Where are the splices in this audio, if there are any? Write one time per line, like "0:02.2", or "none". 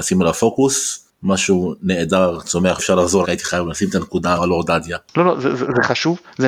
0:02.8
0:03.2
0:04.4